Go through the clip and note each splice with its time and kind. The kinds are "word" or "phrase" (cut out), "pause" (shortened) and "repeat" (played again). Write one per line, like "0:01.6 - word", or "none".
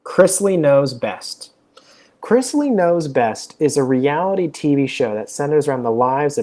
none